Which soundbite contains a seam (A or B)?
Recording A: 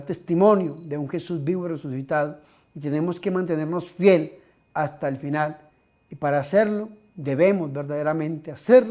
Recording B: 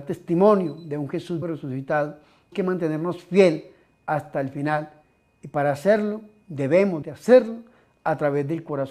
B